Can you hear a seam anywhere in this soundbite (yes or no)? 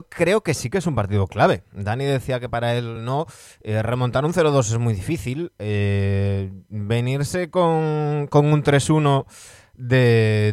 no